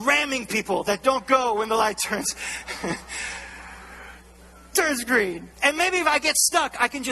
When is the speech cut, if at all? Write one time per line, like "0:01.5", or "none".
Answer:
0:05.5